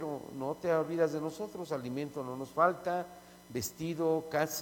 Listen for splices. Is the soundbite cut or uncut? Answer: uncut